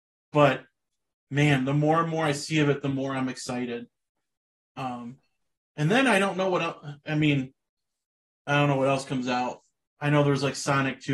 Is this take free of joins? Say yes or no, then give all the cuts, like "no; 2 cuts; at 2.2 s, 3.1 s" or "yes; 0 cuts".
yes; 0 cuts